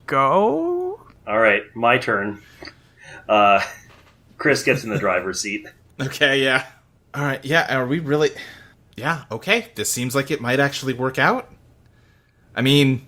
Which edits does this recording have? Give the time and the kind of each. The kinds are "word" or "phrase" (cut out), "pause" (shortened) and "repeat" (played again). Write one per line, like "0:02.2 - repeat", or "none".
none